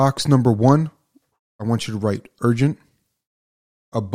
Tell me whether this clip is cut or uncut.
uncut